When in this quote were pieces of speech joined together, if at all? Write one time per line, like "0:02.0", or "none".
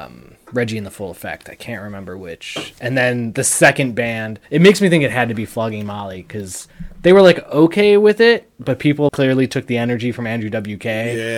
0:04.4
0:09.1

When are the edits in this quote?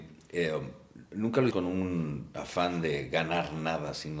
0:01.5

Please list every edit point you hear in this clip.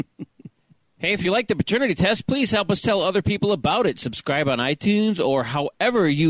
none

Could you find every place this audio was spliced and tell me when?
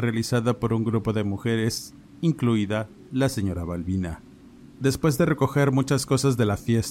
none

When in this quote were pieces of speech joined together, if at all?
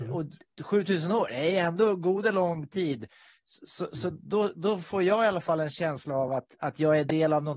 none

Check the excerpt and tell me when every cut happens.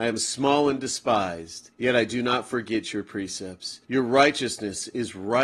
0:01.7
0:03.8

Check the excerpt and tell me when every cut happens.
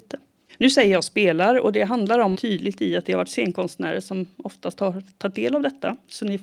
0:02.3

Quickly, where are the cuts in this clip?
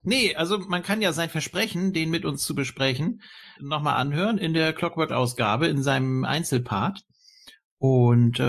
0:03.6
0:05.1

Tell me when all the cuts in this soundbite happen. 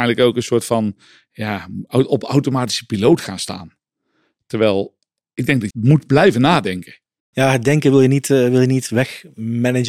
0:05.7

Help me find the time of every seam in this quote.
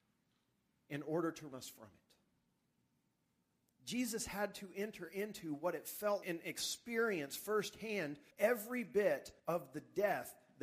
0:01.5
0:06.2
0:08.3
0:09.4

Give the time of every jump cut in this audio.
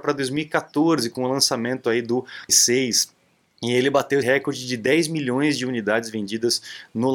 0:02.5
0:04.2

